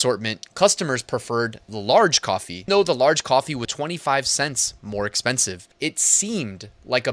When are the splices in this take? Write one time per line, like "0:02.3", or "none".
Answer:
0:02.7
0:03.6
0:05.7